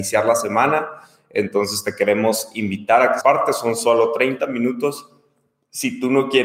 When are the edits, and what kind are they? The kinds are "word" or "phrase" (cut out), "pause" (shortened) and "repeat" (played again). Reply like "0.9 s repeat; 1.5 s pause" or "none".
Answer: 3.2 s word